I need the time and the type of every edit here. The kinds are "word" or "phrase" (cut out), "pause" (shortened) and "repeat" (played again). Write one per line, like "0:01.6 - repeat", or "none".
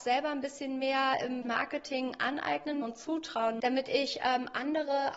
0:01.4 - word
0:02.8 - word
0:03.6 - word